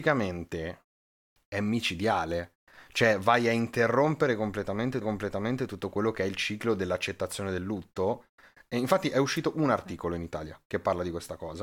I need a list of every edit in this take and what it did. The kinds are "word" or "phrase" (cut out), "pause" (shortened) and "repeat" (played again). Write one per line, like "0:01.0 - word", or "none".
0:05.0 - repeat